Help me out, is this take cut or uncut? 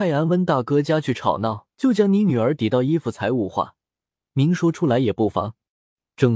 cut